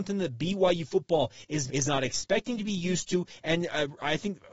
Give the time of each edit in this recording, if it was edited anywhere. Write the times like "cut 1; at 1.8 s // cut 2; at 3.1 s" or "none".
cut 1; at 1.7 s